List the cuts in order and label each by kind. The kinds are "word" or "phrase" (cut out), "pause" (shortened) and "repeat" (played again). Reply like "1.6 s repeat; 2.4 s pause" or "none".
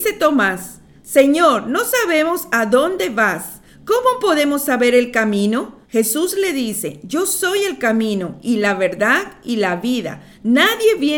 5.8 s pause